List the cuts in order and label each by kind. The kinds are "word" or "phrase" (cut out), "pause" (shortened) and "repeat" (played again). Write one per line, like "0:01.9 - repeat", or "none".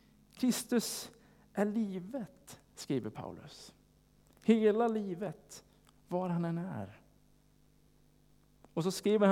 none